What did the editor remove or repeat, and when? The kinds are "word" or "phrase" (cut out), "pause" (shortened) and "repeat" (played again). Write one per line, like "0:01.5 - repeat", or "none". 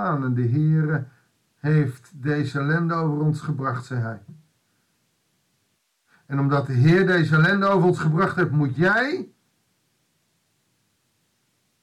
none